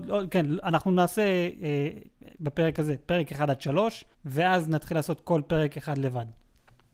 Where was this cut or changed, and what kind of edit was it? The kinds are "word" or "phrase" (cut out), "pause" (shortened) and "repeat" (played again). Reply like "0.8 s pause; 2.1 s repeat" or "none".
4.1 s pause